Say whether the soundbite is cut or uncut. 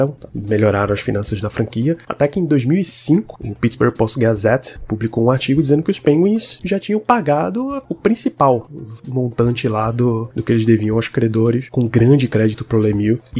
uncut